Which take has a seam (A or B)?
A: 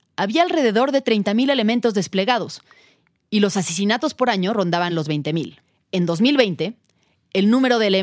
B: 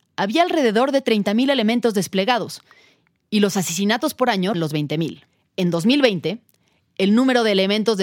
B